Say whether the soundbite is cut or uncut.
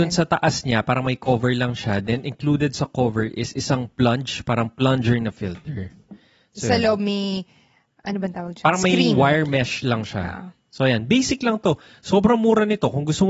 uncut